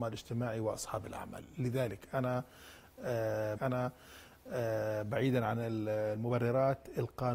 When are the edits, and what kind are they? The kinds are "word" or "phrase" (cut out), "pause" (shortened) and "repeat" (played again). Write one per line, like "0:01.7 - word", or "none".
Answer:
0:03.6 - repeat

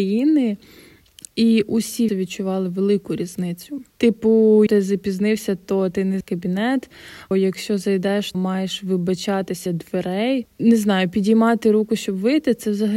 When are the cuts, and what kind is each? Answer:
0:02.1 - word
0:04.7 - word
0:06.2 - word
0:07.3 - word
0:08.3 - word
0:09.7 - word

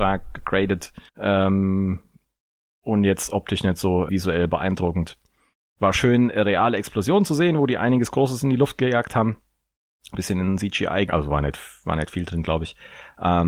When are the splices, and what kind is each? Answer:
0:01.1 - pause
0:04.1 - word
0:10.1 - phrase
0:11.1 - word

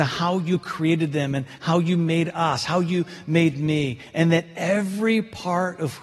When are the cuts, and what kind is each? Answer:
none

